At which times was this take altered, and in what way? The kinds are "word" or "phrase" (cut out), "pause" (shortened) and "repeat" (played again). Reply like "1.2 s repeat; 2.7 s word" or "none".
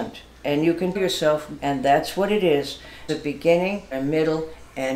1.0 s word; 1.6 s word; 3.1 s word; 3.9 s word